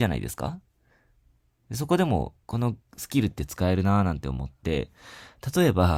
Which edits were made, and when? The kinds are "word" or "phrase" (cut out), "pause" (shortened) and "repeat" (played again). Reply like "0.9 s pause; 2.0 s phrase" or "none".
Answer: 2.4 s pause